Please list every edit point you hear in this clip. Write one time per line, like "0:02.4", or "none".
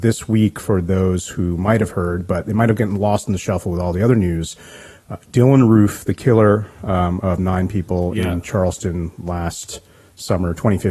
none